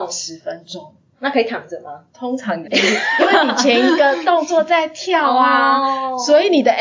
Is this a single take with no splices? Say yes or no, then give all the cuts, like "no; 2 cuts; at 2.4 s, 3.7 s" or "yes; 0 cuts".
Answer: no; 2 cuts; at 2.1 s, 2.6 s